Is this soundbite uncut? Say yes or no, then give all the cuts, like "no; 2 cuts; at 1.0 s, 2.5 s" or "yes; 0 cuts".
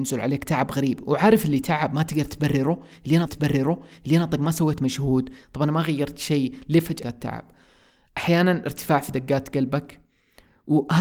no; 2 cuts; at 3.3 s, 7.0 s